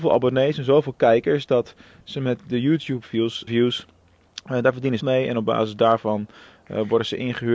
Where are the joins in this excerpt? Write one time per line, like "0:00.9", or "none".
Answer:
0:03.5
0:05.0